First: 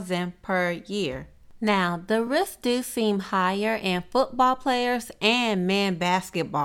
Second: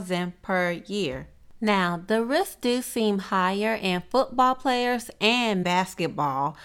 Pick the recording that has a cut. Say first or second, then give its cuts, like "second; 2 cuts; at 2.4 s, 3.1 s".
second; 1 cut; at 5.6 s